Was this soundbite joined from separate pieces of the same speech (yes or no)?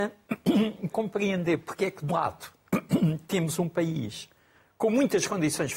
yes